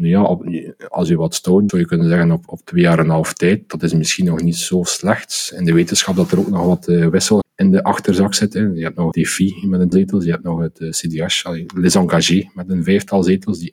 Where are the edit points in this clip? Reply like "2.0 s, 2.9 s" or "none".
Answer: 1.7 s, 7.4 s, 9.1 s, 9.9 s